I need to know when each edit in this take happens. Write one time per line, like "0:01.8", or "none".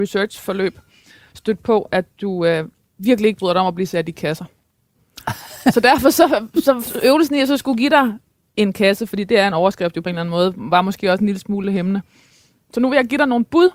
none